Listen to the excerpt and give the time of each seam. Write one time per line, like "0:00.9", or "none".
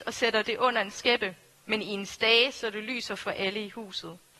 none